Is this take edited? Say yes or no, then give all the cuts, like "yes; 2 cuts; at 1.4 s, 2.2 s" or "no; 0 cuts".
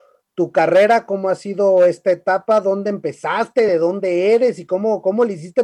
no; 0 cuts